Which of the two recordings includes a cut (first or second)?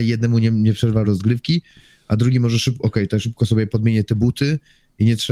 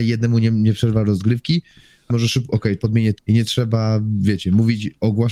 second